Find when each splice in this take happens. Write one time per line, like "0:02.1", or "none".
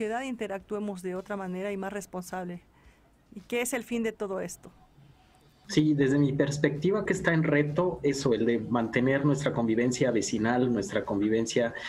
0:07.1